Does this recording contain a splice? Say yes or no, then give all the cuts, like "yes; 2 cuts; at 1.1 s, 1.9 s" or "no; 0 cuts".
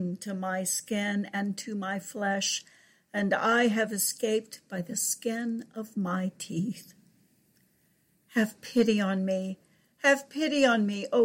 no; 0 cuts